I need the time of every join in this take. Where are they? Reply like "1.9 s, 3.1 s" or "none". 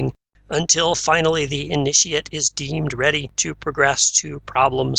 none

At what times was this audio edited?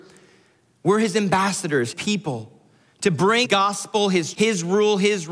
1.9 s, 3.4 s, 4.3 s

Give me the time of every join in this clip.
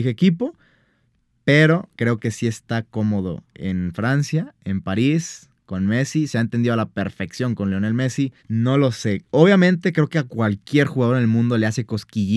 1.9 s, 8.4 s

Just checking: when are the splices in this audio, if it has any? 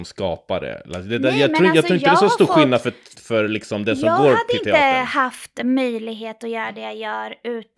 3.1 s

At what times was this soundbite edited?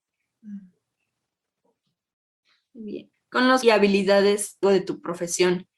3.1 s, 3.6 s, 4.6 s

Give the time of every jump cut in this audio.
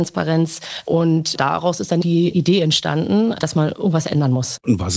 none

